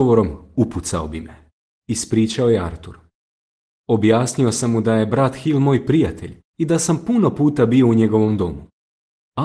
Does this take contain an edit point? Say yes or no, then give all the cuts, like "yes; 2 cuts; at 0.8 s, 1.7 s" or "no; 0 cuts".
no; 0 cuts